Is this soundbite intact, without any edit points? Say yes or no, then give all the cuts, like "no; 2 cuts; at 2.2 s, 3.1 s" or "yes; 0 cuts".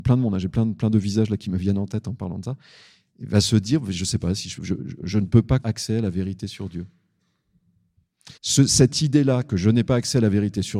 no; 4 cuts; at 4.6 s, 5.0 s, 5.6 s, 8.4 s